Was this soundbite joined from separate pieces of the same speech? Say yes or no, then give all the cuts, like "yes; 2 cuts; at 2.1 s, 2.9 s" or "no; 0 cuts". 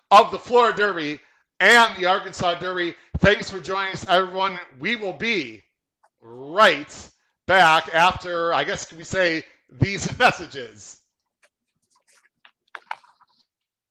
no; 0 cuts